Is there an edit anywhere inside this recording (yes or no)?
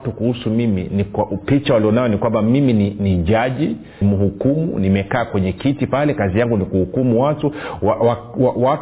yes